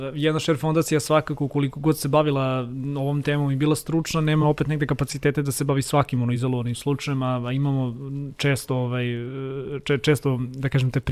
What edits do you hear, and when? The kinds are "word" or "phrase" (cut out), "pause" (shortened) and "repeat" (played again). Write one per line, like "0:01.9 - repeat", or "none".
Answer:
none